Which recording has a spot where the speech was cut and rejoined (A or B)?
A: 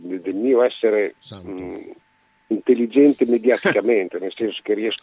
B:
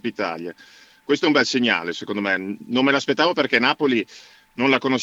A